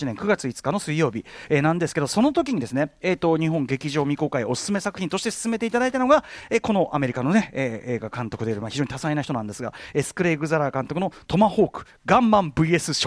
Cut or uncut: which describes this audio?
uncut